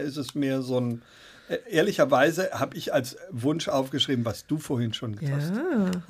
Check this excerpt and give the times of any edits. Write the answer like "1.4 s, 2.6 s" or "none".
5.2 s